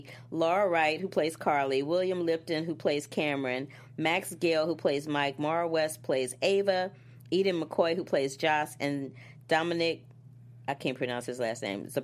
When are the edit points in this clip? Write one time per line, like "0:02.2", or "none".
none